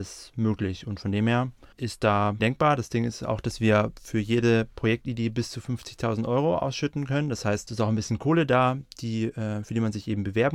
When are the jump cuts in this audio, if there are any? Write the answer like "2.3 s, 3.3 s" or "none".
1.7 s, 2.4 s